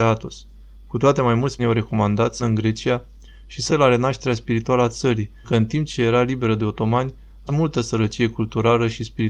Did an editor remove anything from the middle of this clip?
yes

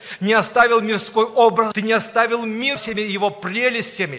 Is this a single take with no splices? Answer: no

